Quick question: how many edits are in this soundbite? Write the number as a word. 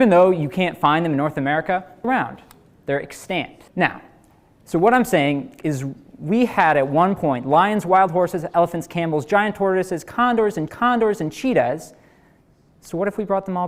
three